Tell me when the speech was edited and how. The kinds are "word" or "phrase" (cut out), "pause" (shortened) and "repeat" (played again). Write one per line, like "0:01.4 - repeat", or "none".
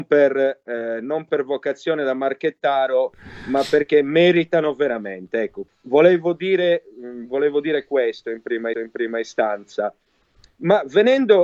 0:05.7 - word
0:08.7 - repeat